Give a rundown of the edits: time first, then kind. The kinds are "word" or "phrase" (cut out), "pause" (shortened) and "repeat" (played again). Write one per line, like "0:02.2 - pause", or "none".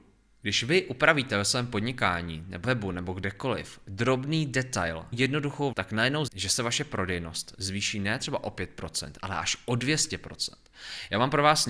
0:02.6 - word
0:05.1 - word
0:05.7 - word
0:06.3 - word